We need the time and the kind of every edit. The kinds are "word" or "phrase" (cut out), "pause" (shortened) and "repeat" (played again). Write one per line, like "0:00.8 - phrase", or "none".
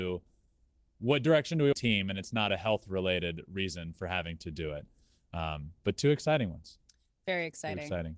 0:01.7 - phrase